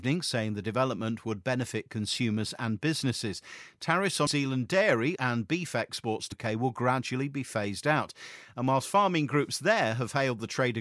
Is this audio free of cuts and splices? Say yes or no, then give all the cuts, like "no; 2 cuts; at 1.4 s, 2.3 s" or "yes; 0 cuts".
no; 3 cuts; at 4.3 s, 5.2 s, 6.3 s